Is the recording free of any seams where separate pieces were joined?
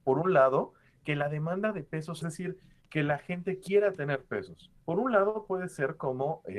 no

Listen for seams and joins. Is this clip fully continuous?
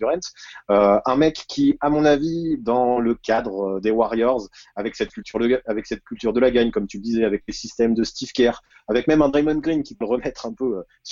no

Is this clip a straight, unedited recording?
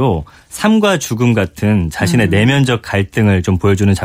yes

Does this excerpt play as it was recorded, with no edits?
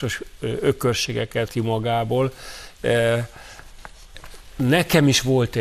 no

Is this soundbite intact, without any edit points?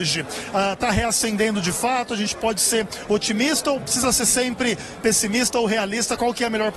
yes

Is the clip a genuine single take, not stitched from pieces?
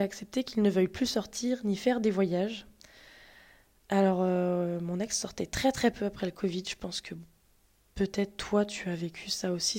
yes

